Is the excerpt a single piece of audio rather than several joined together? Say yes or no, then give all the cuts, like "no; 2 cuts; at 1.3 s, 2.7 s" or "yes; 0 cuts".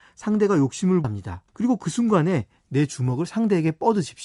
no; 2 cuts; at 1.0 s, 1.5 s